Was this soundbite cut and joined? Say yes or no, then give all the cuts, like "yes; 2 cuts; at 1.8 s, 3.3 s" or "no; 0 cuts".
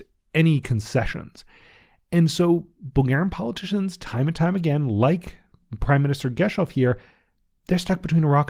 no; 0 cuts